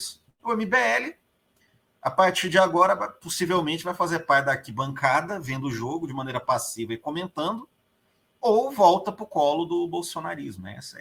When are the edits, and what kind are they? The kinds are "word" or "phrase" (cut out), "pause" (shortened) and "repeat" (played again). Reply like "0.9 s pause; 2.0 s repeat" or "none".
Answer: none